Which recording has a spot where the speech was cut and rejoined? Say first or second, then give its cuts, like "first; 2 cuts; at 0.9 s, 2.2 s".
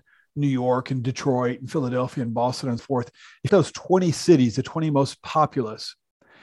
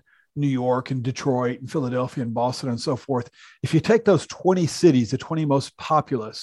first; 2 cuts; at 2.8 s, 3.5 s